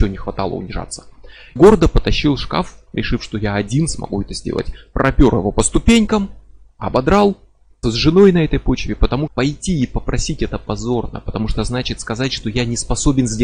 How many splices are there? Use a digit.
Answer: 3